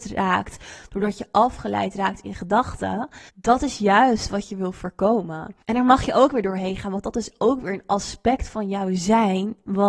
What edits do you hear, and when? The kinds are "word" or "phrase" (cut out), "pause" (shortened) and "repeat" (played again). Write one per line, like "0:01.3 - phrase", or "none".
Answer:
0:03.3 - pause
0:05.6 - pause

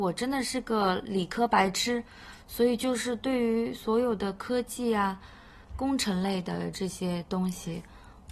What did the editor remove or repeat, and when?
0:05.6 - pause

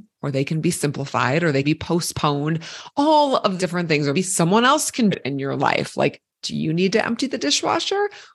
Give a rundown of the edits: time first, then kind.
0:01.6 - word
0:03.6 - word
0:04.1 - word
0:05.1 - word
0:06.3 - pause

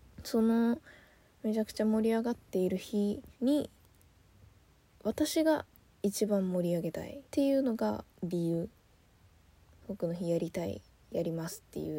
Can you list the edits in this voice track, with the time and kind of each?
0:03.3 - pause
0:07.2 - pause
0:08.1 - pause

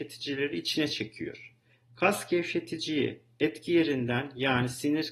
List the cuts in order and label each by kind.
none

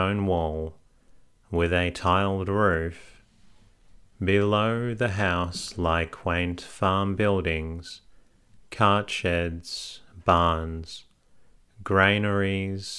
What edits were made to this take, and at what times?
none

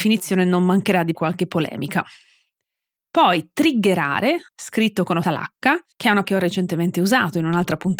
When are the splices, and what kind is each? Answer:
0:01.1 - word
0:04.5 - pause
0:05.2 - word
0:05.9 - pause
0:06.2 - word

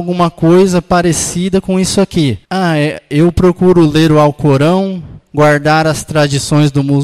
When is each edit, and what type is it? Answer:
0:02.4 - pause
0:05.2 - pause

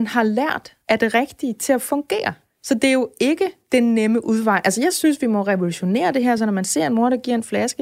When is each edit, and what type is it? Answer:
none

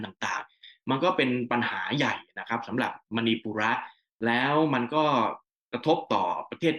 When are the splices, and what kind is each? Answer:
none

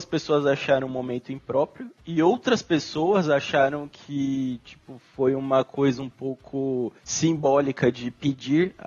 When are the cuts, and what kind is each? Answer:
none

